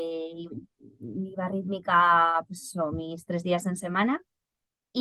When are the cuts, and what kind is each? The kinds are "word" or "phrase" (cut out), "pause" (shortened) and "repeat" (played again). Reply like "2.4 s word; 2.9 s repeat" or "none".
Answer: none